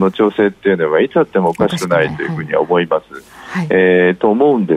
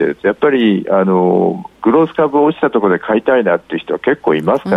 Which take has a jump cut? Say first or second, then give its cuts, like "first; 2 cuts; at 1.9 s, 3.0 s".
second; 1 cut; at 1.7 s